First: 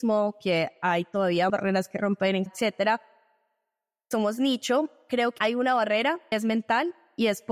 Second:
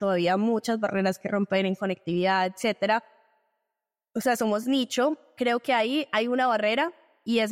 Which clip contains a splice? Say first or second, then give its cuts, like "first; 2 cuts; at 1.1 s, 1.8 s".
first; 5 cuts; at 1.5 s, 2.5 s, 4.1 s, 5.4 s, 6.3 s